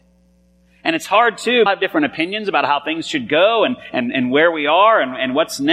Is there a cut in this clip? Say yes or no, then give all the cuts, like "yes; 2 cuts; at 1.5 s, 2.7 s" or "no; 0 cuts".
yes; 1 cut; at 1.7 s